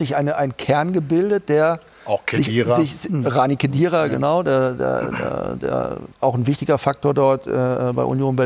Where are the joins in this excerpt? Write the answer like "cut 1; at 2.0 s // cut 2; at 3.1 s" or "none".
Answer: cut 1; at 6.1 s